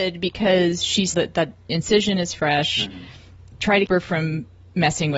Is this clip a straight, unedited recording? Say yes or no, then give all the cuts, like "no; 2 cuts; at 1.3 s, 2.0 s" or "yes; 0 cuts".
no; 2 cuts; at 1.1 s, 3.9 s